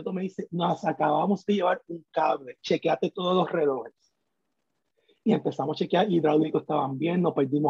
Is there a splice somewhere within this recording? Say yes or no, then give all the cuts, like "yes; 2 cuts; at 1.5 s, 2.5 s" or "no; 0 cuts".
no; 0 cuts